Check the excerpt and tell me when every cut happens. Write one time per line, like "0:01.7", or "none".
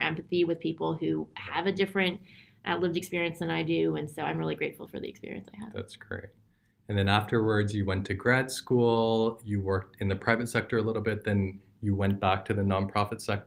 none